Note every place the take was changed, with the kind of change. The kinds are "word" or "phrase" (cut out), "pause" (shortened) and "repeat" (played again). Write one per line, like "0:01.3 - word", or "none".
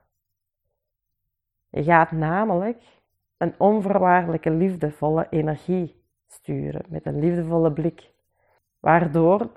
none